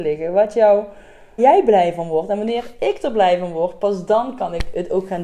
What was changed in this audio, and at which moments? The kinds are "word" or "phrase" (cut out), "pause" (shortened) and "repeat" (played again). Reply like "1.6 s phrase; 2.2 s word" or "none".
1.4 s word